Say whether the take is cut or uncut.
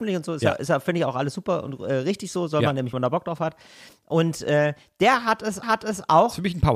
cut